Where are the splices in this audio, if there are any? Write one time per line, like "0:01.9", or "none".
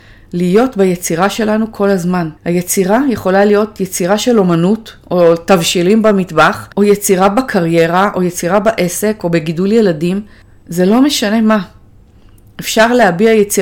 0:02.4
0:06.7
0:10.4